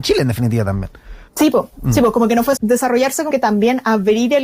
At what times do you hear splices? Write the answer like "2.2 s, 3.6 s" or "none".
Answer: 1.3 s, 1.7 s, 2.6 s, 3.3 s